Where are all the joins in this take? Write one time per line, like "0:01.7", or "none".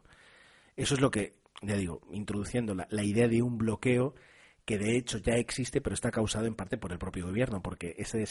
none